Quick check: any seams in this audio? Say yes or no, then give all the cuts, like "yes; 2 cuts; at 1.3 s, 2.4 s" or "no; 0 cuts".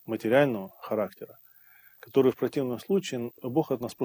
no; 0 cuts